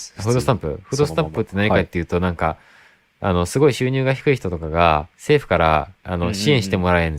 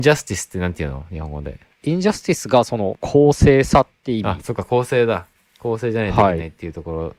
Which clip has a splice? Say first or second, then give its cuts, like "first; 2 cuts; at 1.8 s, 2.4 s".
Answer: first; 1 cut; at 5.1 s